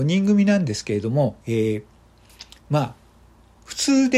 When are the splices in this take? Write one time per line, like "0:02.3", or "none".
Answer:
0:01.4